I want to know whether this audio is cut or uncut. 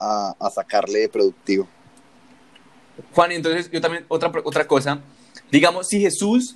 uncut